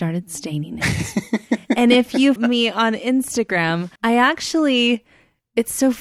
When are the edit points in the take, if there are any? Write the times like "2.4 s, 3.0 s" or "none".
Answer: 2.4 s, 4.0 s